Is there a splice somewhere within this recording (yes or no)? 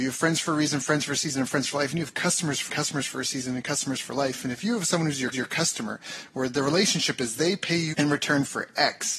yes